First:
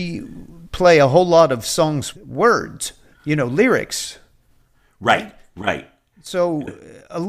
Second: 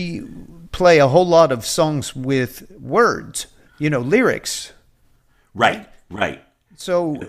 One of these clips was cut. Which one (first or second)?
first